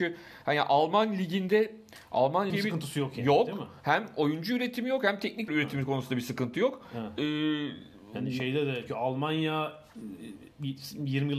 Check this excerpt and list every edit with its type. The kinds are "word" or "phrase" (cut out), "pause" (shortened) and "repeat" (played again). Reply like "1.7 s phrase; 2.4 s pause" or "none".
2.5 s phrase; 5.5 s word; 8.9 s word

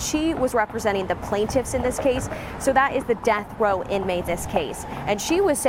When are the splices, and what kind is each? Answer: 4.3 s word

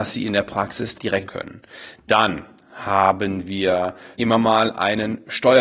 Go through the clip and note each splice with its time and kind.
0.9 s word; 1.3 s word; 4.1 s word

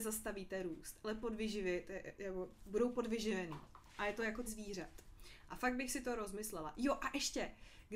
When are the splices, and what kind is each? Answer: 4.5 s word

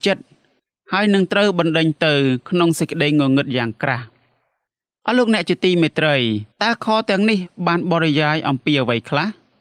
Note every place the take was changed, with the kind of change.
6.5 s pause

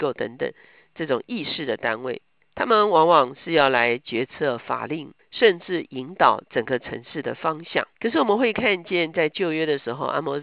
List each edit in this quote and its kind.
2.4 s pause; 5.2 s phrase; 7.9 s pause

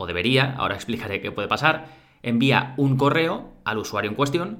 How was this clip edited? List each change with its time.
none

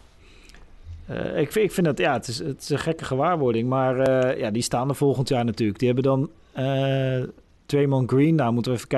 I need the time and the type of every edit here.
7.5 s pause

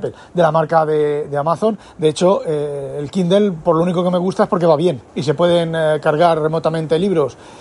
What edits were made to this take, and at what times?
5.1 s pause

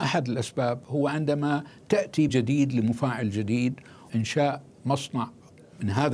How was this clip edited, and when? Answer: 2.3 s word; 4.1 s word

